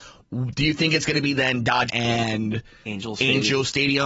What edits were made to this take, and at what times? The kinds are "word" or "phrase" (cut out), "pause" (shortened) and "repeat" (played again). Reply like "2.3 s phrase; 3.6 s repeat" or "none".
1.9 s word